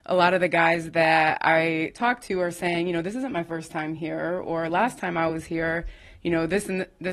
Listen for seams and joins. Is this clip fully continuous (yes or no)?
yes